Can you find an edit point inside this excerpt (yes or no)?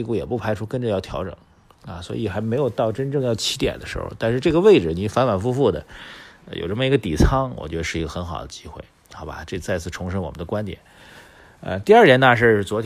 no